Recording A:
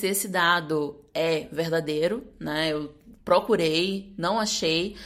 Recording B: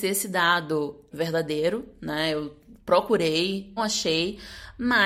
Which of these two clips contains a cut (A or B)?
B